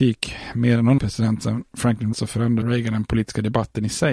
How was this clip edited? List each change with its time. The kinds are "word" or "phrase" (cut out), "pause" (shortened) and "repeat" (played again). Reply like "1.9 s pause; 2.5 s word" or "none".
1.0 s word; 2.1 s word; 2.6 s word